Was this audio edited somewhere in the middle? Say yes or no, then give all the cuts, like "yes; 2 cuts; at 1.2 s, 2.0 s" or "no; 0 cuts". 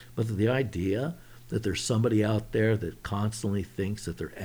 no; 0 cuts